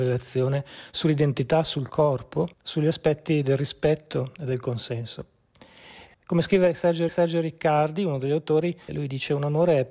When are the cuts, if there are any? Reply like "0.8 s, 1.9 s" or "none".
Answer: 2.5 s, 6.1 s, 7.1 s, 8.9 s